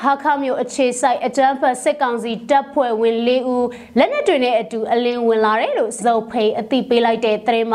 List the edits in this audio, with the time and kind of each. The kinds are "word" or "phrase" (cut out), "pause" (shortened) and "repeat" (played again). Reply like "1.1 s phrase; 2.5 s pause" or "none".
6.0 s word